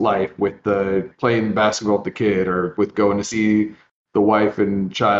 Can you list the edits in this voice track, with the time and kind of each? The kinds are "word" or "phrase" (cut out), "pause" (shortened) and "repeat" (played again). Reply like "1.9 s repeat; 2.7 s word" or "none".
1.1 s word